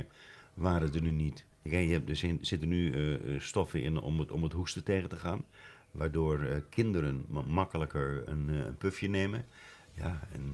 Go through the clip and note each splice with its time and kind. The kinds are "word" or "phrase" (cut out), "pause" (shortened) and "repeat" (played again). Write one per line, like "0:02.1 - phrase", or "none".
0:01.5 - pause